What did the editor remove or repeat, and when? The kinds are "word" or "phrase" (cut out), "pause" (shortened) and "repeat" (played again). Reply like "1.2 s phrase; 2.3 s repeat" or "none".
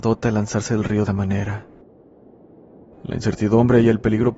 1.1 s phrase